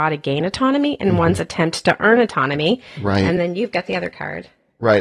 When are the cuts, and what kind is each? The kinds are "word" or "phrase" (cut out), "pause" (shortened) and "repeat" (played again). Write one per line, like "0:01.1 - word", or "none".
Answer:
none

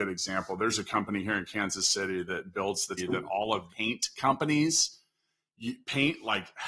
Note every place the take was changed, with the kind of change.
0:03.0 - word
0:03.7 - word

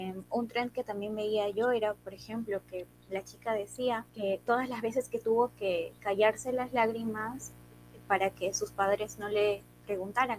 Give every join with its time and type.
0:02.0 - pause
0:04.1 - pause

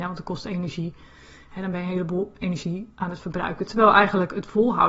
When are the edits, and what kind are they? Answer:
none

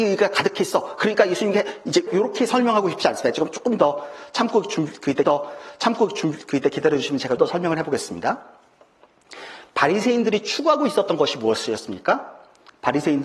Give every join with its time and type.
0:02.1 - word
0:05.2 - repeat
0:07.4 - word

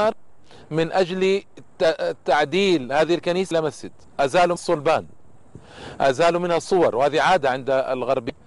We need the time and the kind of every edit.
0:03.5 - word
0:04.6 - word

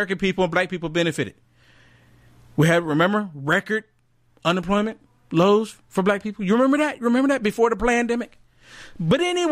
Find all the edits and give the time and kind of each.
none

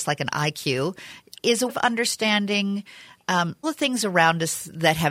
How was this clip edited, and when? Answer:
0:01.4 - word
0:01.7 - word
0:03.6 - word

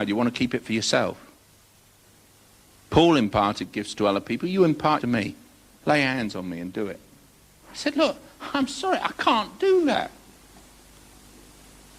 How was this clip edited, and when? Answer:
0:05.0 - phrase

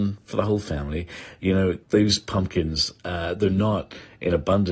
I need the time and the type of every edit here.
0:01.8 - pause

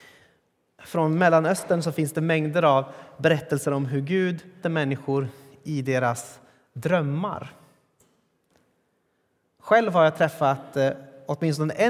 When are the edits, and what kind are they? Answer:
0:04.6 - word

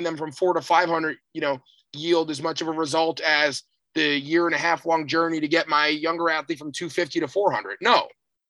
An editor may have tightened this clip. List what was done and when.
none

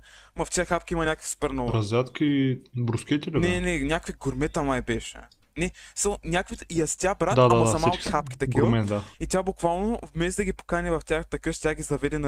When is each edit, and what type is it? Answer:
none

